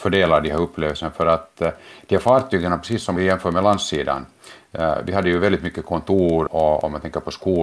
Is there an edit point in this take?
yes; 2 cuts; at 3.2 s, 6.5 s

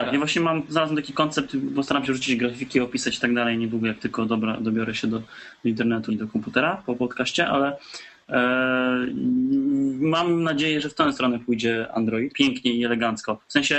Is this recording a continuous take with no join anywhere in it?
no; 2 cuts; at 6.1 s, 12.3 s

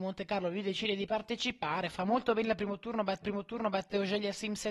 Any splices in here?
yes; 1 cut; at 3.2 s

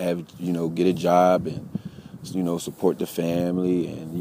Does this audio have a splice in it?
no; 0 cuts

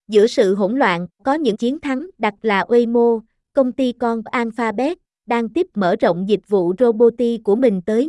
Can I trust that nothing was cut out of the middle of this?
no; 5 cuts; at 1.2 s, 1.5 s, 2.4 s, 4.3 s, 5.7 s

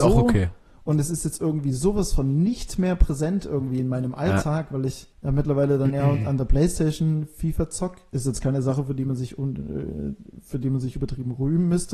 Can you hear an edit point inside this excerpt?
yes; 1 cut; at 5.1 s

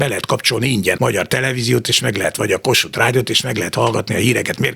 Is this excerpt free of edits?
no; 1 cut; at 1.0 s

